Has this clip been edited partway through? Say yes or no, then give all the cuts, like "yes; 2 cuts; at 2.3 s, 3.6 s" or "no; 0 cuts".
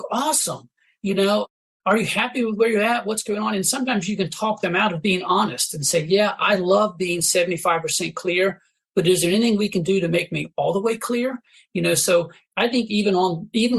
no; 0 cuts